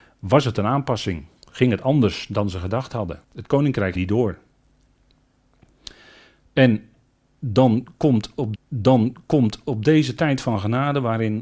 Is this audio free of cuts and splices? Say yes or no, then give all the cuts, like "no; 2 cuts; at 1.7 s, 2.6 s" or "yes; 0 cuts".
no; 3 cuts; at 3.2 s, 4.0 s, 8.6 s